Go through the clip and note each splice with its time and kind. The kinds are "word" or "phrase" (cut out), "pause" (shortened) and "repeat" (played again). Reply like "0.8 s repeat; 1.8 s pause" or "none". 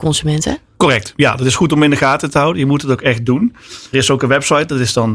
3.9 s word